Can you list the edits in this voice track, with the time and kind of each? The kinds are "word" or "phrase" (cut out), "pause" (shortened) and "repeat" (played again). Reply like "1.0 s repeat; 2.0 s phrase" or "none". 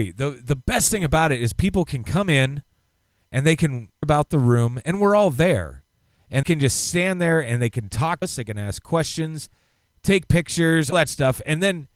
4.0 s word; 6.4 s word; 8.2 s word; 10.9 s word